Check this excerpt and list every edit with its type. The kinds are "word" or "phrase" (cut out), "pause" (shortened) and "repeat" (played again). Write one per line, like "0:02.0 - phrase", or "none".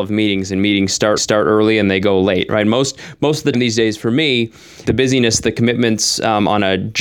0:01.2 - repeat
0:03.5 - word
0:04.8 - word